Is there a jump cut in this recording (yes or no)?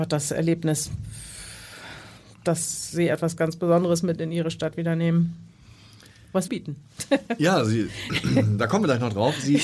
yes